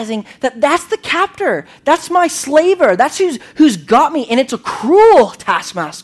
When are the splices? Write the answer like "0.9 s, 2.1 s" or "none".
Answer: none